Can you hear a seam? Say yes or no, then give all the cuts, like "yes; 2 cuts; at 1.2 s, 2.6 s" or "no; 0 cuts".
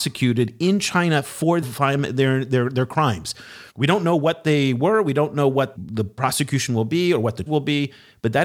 yes; 4 cuts; at 1.6 s, 3.7 s, 5.8 s, 7.5 s